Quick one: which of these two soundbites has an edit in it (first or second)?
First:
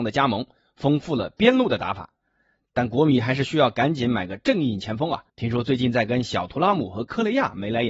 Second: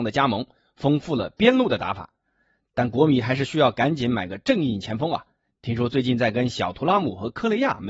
first